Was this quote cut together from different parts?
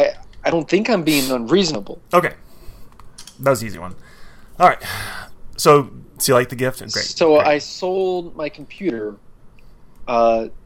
no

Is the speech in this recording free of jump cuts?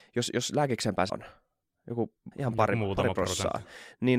no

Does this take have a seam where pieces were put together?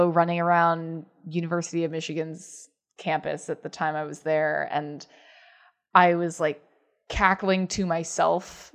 no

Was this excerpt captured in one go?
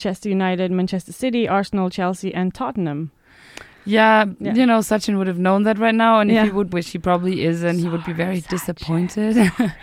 no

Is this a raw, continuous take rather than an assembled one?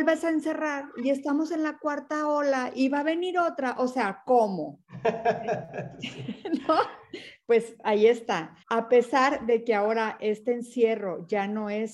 no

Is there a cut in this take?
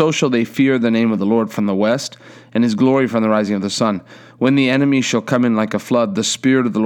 no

